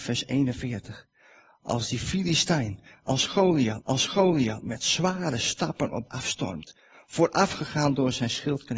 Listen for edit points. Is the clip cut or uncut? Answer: cut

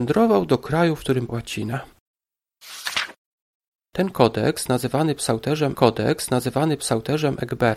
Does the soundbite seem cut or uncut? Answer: cut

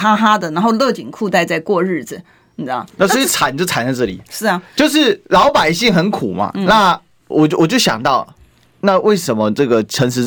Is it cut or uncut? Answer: uncut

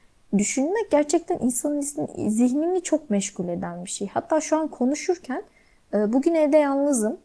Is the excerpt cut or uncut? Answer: uncut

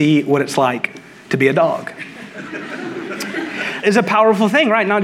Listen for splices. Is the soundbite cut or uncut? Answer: cut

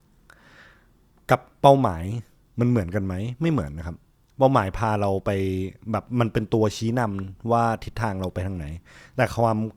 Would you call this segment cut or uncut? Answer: uncut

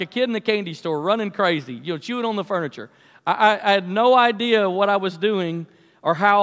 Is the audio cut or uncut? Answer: uncut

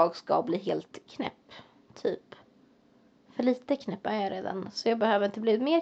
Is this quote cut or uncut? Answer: uncut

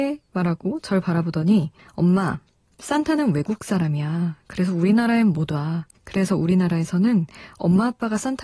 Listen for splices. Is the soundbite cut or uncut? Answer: cut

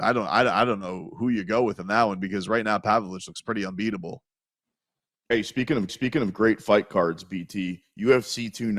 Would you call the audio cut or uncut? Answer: cut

